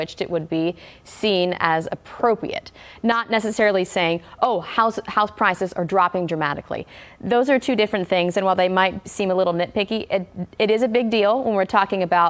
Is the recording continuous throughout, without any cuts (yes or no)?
yes